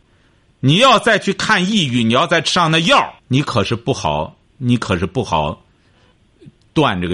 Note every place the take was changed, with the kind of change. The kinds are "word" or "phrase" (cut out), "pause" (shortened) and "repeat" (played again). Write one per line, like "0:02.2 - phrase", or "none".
0:03.2 - pause